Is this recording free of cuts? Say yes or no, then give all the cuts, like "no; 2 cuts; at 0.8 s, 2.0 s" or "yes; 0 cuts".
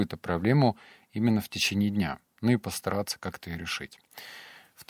yes; 0 cuts